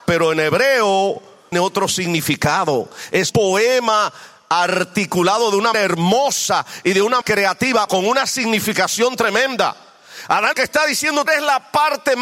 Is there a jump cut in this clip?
yes; 7 cuts; at 1.5 s, 3.3 s, 5.7 s, 7.2 s, 7.9 s, 10.5 s, 11.3 s

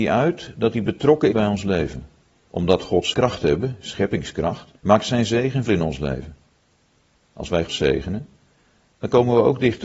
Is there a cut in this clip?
yes; 7 cuts; at 1.3 s, 2.3 s, 3.1 s, 4.8 s, 5.7 s, 6.9 s, 7.7 s

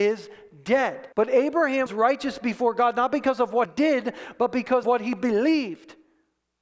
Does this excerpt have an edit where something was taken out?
yes; 4 cuts; at 1.1 s, 1.9 s, 3.7 s, 4.8 s

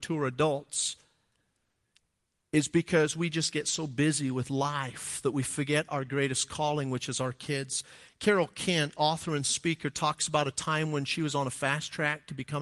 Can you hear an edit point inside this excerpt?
no; 0 cuts

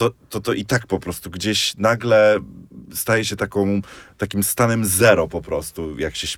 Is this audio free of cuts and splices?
yes; 0 cuts

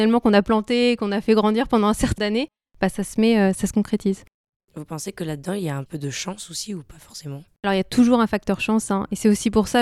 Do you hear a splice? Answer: yes; 2 cuts; at 2.2 s, 5.9 s

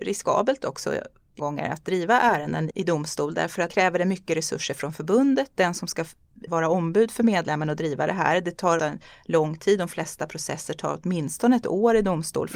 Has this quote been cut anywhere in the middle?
yes; 5 cuts; at 1.4 s, 2.7 s, 3.7 s, 6.5 s, 8.8 s

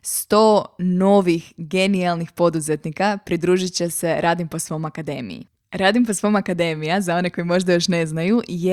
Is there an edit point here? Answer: yes; 1 cut; at 5.6 s

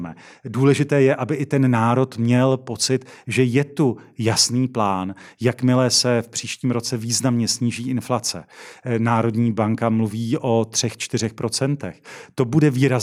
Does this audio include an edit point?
no; 0 cuts

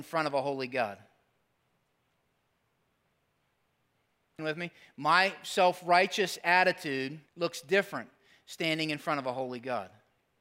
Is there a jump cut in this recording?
yes; 2 cuts; at 4.4 s, 7.3 s

